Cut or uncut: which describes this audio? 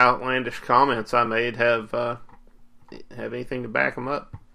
uncut